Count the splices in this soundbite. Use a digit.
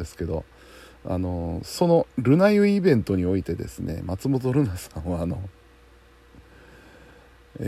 1